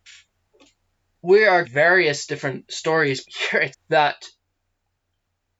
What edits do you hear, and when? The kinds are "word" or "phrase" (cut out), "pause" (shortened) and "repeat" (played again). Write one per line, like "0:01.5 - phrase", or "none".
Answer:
0:01.6 - word
0:03.2 - word
0:03.7 - word